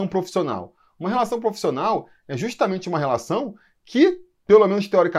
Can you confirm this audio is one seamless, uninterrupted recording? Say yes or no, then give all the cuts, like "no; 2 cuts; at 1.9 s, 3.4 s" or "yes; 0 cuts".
yes; 0 cuts